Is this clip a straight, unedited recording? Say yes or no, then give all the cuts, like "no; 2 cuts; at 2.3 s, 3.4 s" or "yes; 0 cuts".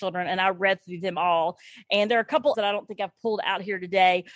no; 1 cut; at 2.5 s